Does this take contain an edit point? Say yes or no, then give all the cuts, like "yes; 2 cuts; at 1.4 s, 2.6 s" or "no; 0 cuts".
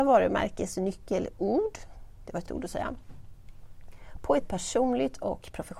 yes; 2 cuts; at 2.5 s, 4.4 s